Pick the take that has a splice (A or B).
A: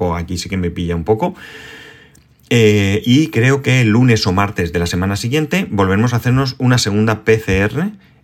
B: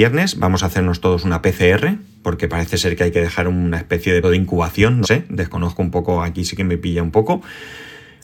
B